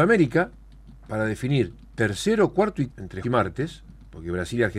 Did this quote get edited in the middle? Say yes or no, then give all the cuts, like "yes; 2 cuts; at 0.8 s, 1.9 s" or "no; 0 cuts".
yes; 2 cuts; at 2.9 s, 3.2 s